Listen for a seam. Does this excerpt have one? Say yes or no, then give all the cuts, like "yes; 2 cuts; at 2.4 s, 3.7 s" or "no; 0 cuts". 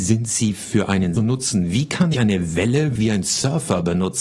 yes; 3 cuts; at 1.2 s, 2.1 s, 3.0 s